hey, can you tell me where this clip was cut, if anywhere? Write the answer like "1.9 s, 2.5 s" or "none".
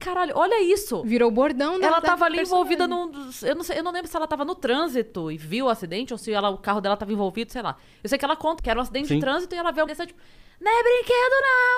8.6 s, 9.9 s